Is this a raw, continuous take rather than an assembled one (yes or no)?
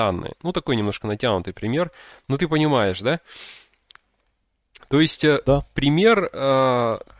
yes